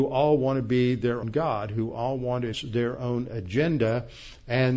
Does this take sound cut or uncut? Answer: cut